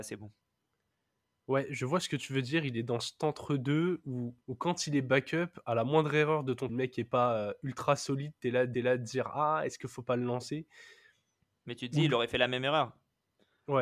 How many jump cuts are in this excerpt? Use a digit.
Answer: 3